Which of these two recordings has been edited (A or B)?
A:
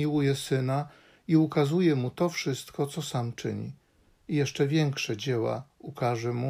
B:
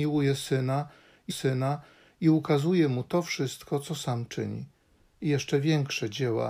B